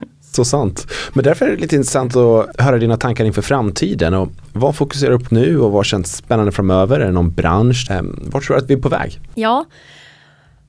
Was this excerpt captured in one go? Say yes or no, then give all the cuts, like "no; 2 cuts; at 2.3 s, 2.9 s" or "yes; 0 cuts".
no; 3 cuts; at 2.5 s, 5.3 s, 7.9 s